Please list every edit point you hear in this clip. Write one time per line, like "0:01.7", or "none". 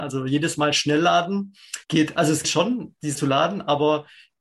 0:01.8
0:02.4
0:03.2